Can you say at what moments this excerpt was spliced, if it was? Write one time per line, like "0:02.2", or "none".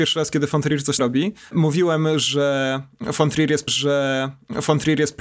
0:01.0
0:03.7